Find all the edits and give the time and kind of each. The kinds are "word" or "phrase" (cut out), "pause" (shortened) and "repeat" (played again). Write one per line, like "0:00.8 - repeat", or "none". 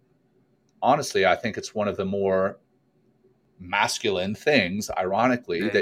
none